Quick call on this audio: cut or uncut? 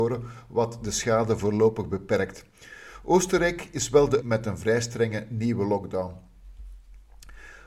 cut